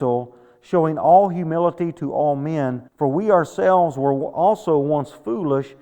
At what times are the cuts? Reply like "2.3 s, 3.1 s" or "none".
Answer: 2.9 s

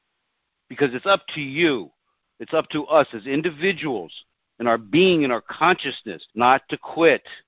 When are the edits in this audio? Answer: 6.3 s

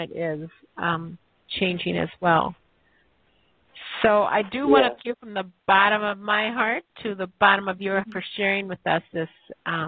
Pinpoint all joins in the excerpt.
5.0 s, 8.0 s

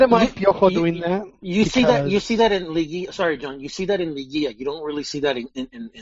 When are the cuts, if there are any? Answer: none

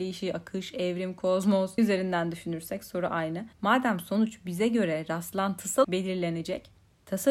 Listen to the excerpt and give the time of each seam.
1.8 s, 3.5 s, 5.8 s

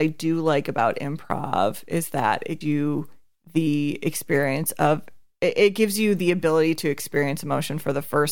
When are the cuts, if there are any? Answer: 2.6 s

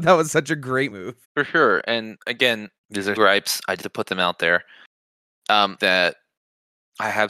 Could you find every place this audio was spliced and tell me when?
0.9 s, 1.2 s, 2.8 s, 3.2 s, 3.8 s, 5.8 s

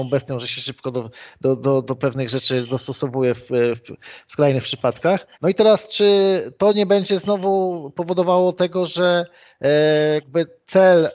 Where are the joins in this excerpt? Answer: 5.3 s

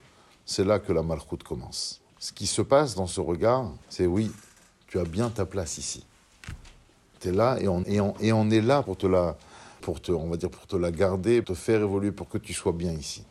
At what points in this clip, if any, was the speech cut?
2.1 s, 3.8 s, 7.8 s, 8.9 s, 9.8 s, 11.4 s

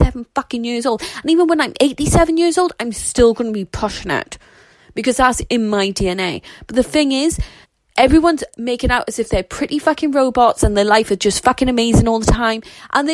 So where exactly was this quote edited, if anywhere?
7.6 s

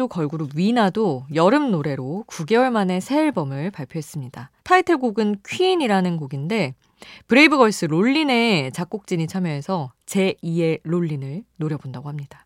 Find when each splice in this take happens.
4.6 s

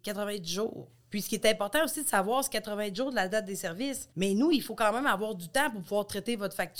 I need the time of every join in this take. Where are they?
4.1 s

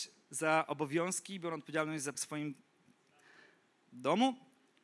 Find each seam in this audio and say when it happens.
2.1 s

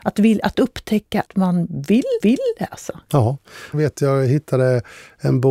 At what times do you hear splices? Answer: 1.3 s, 2.2 s, 3.7 s

